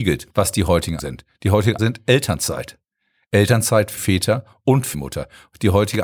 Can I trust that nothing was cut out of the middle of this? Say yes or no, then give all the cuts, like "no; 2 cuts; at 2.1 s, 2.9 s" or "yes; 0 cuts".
no; 4 cuts; at 1.0 s, 1.8 s, 4.0 s, 4.9 s